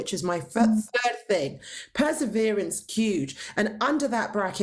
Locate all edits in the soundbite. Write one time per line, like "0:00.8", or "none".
0:02.9